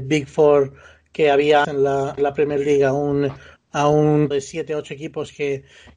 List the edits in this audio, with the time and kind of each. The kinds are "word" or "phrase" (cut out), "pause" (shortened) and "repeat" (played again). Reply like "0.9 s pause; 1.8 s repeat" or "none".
1.6 s word; 2.2 s word; 4.3 s word